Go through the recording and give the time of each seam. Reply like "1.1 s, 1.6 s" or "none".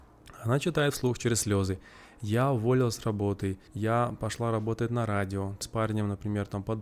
3.7 s, 5.6 s